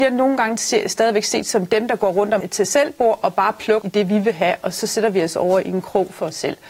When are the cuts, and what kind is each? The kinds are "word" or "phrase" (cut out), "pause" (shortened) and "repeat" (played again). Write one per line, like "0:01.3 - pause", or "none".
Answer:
0:02.4 - word
0:03.8 - word